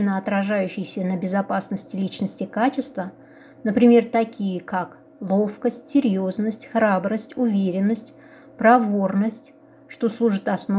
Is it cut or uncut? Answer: uncut